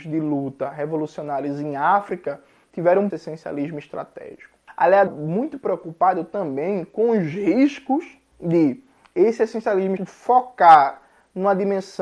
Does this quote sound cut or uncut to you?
cut